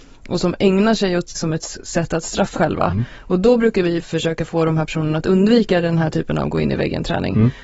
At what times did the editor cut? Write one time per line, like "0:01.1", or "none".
0:01.4
0:02.6